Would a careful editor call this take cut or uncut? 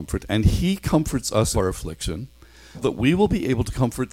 cut